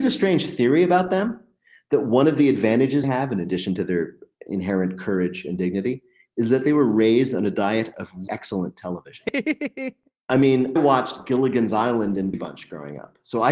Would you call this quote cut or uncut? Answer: cut